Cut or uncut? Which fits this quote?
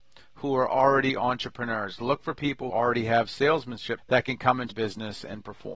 cut